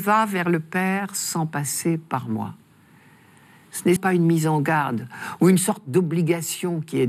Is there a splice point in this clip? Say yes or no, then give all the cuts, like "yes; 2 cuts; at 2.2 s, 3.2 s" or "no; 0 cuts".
yes; 1 cut; at 4.0 s